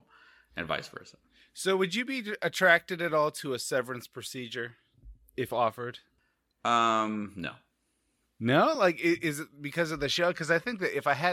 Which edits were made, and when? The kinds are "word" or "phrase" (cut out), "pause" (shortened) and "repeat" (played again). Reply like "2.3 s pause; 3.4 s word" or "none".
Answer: none